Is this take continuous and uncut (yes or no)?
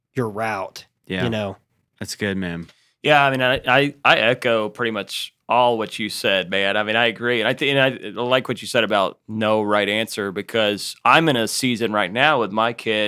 yes